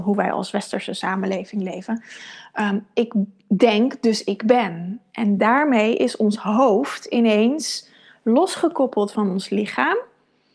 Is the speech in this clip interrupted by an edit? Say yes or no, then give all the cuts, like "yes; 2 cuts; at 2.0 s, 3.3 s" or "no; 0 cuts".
no; 0 cuts